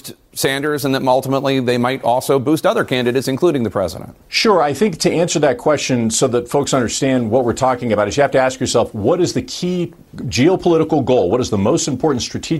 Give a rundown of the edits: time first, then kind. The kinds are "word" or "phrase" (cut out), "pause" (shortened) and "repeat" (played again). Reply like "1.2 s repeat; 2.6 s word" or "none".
4.2 s pause